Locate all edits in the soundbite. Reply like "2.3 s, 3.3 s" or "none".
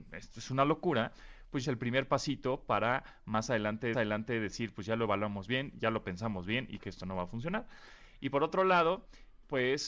1.6 s, 3.9 s, 6.8 s